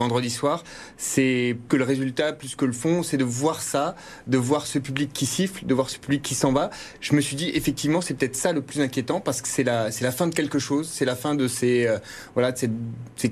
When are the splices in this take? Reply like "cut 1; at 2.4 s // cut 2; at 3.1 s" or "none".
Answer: cut 1; at 1.7 s